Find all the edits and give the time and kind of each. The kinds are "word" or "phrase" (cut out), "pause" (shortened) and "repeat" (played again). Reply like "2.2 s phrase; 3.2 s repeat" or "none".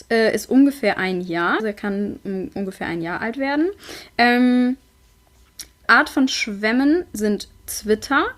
1.6 s word; 5.8 s word